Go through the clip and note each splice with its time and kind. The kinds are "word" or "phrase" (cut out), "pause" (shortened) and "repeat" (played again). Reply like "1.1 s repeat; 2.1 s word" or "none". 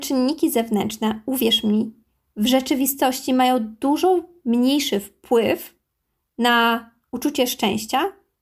none